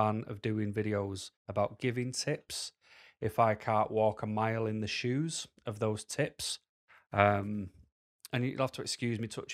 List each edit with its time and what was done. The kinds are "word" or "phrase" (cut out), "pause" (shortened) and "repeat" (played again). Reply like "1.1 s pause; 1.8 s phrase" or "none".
1.4 s pause